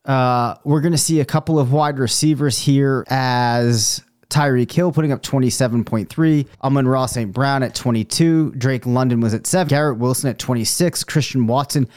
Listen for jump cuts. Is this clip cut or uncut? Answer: cut